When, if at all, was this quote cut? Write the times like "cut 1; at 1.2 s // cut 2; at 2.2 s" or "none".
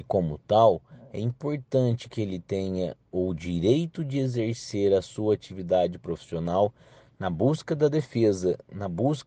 none